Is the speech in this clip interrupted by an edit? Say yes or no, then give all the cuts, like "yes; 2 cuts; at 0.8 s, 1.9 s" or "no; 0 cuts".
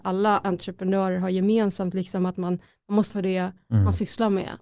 yes; 1 cut; at 3.1 s